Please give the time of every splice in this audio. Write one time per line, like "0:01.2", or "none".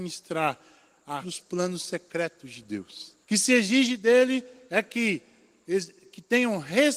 0:01.2
0:03.2